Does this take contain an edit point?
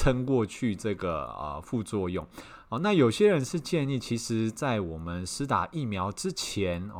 no; 0 cuts

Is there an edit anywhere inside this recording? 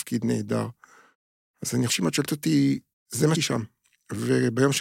yes; 3 cuts; at 1.9 s, 2.9 s, 3.3 s

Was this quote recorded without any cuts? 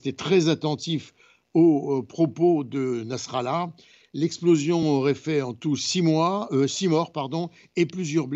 yes; 0 cuts

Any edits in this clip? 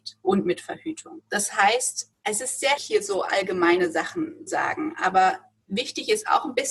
yes; 4 cuts; at 1.3 s, 2.2 s, 2.8 s, 4.5 s

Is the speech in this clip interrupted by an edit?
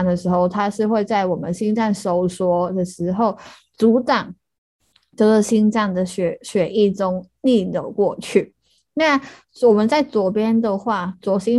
no; 0 cuts

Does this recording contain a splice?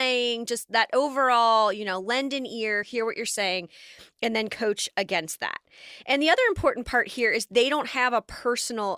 no; 0 cuts

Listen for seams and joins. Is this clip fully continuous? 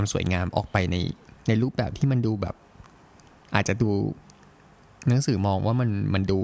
yes; 0 cuts

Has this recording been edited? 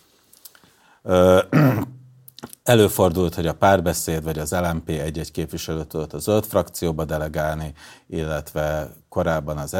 no; 0 cuts

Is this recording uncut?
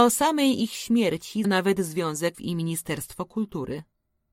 no; 2 cuts; at 1.4 s, 2.3 s

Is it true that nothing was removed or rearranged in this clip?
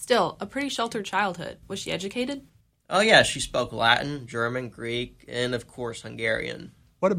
yes; 0 cuts

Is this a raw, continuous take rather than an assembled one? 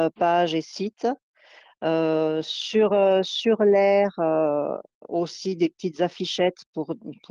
yes; 0 cuts

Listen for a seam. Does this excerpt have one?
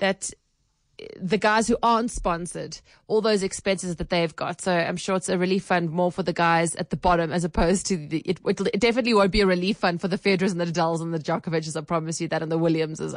no; 0 cuts

